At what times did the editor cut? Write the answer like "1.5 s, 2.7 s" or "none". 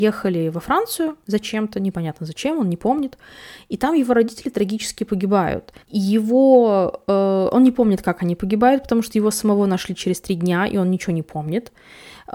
5.8 s